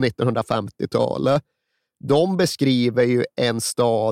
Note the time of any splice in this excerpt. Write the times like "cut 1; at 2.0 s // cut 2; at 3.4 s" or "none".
none